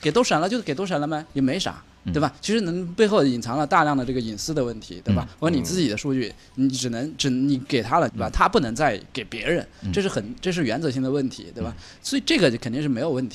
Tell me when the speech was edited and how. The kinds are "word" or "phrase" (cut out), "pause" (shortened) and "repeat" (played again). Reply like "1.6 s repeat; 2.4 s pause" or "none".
1.3 s pause; 8.1 s phrase